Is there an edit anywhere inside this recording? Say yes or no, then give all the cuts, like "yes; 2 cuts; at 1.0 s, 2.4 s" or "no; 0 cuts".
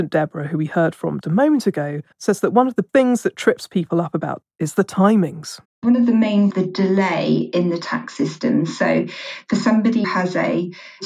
yes; 7 cuts; at 1.2 s, 2.1 s, 2.9 s, 4.4 s, 5.6 s, 6.5 s, 10.0 s